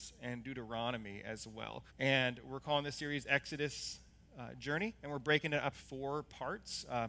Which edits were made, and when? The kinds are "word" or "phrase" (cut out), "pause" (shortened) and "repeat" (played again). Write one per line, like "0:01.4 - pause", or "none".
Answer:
0:01.9 - pause
0:05.7 - word